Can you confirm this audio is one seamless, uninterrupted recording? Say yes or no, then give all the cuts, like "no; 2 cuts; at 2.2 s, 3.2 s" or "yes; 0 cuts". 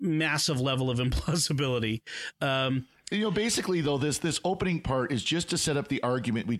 yes; 0 cuts